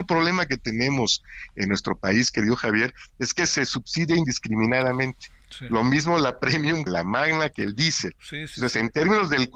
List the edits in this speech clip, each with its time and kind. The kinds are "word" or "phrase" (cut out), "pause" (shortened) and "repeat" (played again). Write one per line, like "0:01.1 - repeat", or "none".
0:06.9 - word